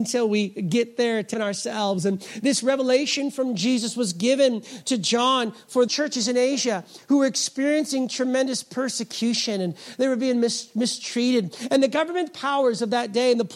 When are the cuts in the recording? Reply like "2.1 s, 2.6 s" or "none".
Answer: 1.3 s, 5.9 s